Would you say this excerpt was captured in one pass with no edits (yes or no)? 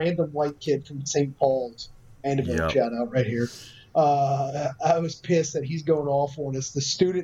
yes